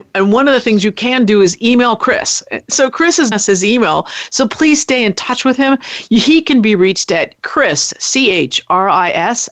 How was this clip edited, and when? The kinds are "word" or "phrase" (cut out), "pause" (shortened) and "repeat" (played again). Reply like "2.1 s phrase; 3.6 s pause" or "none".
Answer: 3.3 s word